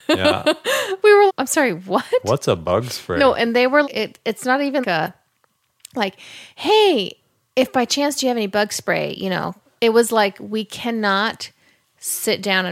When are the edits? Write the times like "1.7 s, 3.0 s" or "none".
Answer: 1.3 s, 3.8 s, 4.8 s, 9.8 s